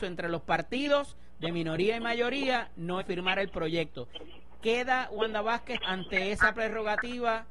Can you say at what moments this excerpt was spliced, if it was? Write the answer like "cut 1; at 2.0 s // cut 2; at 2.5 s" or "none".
cut 1; at 3.0 s // cut 2; at 5.8 s